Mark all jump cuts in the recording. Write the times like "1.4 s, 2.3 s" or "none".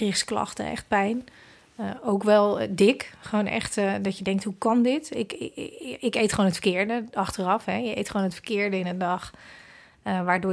none

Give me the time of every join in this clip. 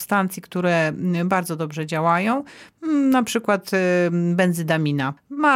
none

